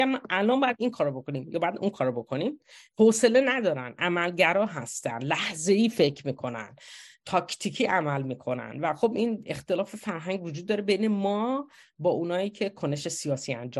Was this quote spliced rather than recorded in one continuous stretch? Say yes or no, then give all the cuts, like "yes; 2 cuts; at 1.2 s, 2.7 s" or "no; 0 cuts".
no; 0 cuts